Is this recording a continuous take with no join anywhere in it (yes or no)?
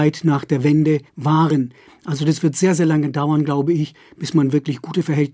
no